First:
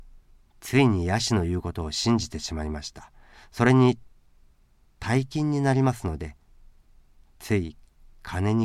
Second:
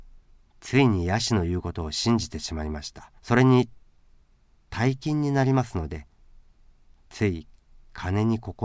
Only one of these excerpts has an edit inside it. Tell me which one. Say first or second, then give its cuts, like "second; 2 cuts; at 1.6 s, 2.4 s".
second; 1 cut; at 3.2 s